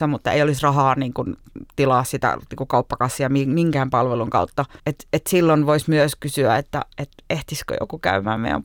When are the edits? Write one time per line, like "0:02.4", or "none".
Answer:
0:04.8
0:06.9